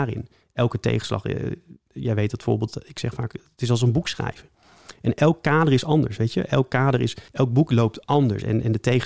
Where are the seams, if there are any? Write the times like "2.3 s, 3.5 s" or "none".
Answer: 7.3 s